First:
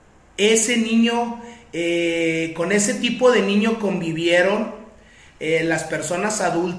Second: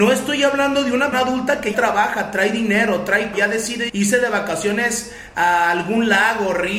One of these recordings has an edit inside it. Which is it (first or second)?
second